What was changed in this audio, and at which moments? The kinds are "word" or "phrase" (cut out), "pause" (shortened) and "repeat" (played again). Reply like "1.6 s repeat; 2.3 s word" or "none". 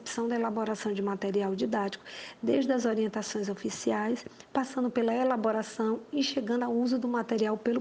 none